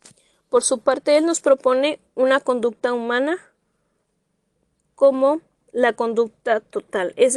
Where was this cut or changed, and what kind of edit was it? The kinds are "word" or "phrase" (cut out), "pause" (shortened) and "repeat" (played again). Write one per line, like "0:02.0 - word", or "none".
none